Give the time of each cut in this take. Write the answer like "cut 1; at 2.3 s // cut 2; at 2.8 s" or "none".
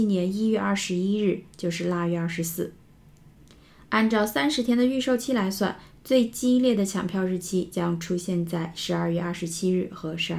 none